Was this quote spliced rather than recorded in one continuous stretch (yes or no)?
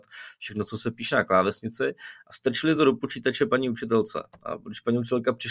no